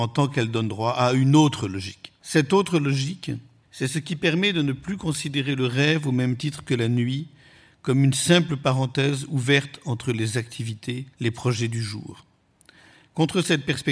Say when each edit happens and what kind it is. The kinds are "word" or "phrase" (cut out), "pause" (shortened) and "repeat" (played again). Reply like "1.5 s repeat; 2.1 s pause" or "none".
2.2 s pause; 3.6 s pause; 11.1 s pause